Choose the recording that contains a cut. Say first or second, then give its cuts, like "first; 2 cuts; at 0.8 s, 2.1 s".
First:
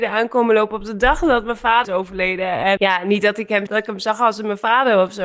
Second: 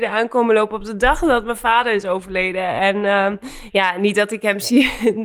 first; 3 cuts; at 1.8 s, 2.8 s, 3.7 s